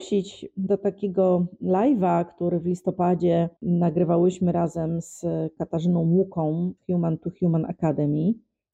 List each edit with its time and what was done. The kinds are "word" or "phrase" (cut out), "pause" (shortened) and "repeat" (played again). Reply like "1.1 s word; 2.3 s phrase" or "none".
3.6 s pause; 6.8 s word